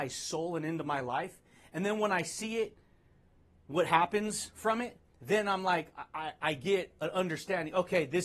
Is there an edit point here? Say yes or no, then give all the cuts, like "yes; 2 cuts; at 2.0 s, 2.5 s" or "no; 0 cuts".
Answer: no; 0 cuts